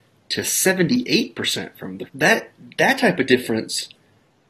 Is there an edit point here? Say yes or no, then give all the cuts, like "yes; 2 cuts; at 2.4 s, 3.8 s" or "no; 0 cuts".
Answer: yes; 1 cut; at 2.1 s